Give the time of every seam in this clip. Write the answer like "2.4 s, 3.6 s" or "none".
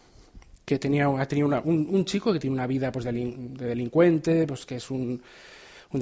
none

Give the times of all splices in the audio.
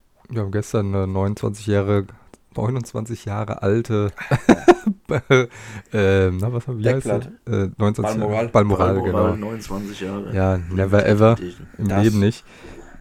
none

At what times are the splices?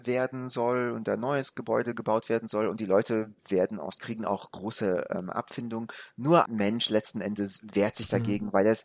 3.4 s, 4.0 s, 6.4 s

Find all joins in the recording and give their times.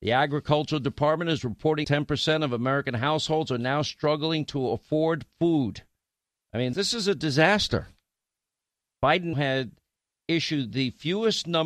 1.8 s, 6.7 s, 9.3 s

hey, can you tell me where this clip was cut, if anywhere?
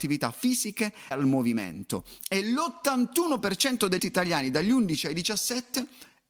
1.1 s, 4.0 s

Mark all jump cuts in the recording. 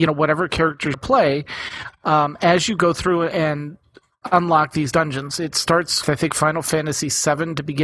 0.9 s, 6.0 s

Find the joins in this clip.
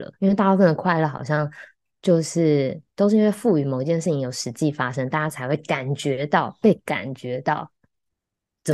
none

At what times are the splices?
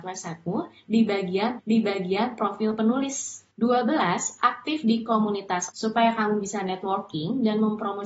1.6 s, 3.5 s, 5.7 s

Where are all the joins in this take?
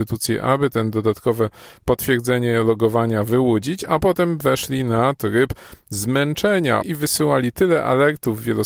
6.8 s

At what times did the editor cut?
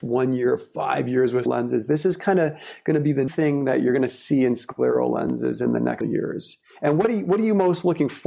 1.5 s, 3.3 s, 6.0 s

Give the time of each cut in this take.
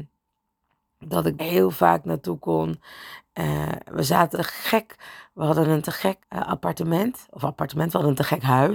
1.4 s, 4.3 s, 6.2 s

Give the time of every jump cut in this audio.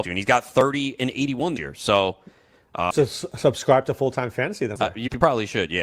1.6 s, 2.9 s, 4.8 s

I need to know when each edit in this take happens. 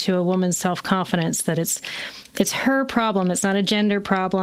none

